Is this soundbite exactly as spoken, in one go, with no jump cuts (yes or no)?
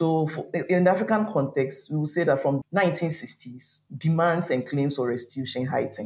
no